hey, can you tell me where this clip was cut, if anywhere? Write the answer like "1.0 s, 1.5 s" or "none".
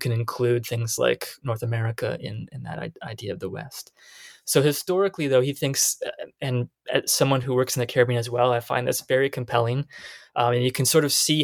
none